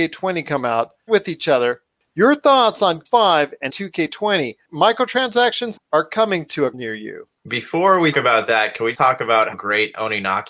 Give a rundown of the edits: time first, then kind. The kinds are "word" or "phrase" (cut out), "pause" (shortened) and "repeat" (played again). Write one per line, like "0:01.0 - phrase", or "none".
0:01.1 - word
0:03.1 - word
0:03.7 - word
0:05.8 - word
0:06.7 - word
0:08.1 - word
0:08.9 - word
0:09.5 - word

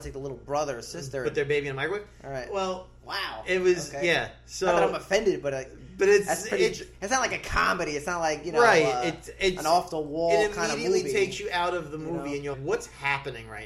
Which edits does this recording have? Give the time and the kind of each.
0:12.5 - word

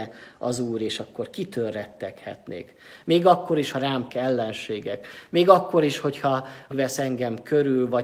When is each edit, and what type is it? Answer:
0:03.7 - word
0:04.1 - word
0:06.7 - word

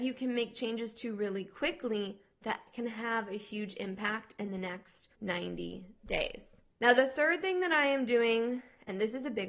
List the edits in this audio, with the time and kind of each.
0:05.1 - pause
0:06.7 - pause

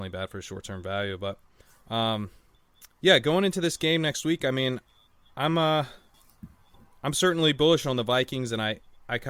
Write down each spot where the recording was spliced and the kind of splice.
none

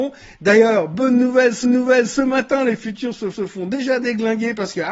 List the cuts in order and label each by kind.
0:01.6 - repeat
0:03.3 - repeat

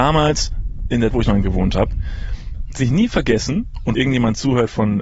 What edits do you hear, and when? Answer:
0:01.1 - word
0:01.4 - word
0:02.8 - word
0:03.9 - word

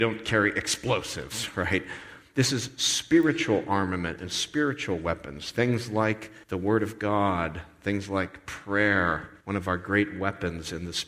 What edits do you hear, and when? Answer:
0:06.4 - pause
0:09.4 - pause

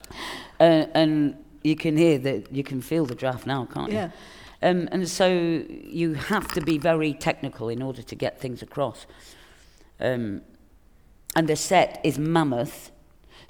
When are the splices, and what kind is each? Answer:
none

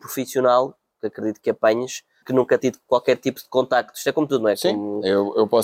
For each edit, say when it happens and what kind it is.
0:02.2 - word
0:02.6 - word

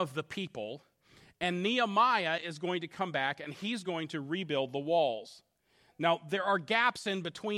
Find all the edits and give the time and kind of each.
none

